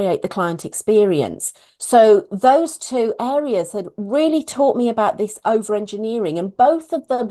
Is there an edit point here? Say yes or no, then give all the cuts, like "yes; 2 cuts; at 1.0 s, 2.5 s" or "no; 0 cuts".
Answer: no; 0 cuts